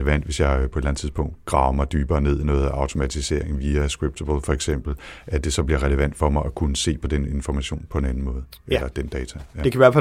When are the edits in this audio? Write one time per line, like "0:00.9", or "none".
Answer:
0:08.6